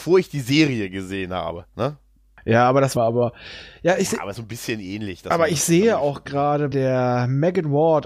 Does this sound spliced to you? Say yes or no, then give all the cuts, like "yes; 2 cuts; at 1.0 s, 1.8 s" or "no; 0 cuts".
yes; 4 cuts; at 1.7 s, 3.0 s, 4.3 s, 6.7 s